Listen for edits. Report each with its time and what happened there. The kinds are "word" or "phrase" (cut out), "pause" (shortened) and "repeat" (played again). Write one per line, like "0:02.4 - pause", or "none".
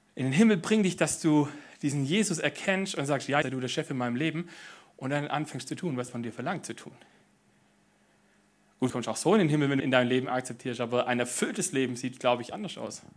0:03.4 - word
0:06.1 - word
0:08.9 - word
0:09.8 - word